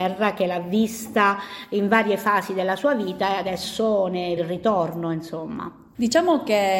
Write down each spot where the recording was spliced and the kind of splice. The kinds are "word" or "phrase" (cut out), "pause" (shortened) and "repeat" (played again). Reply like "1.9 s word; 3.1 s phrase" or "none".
4.4 s word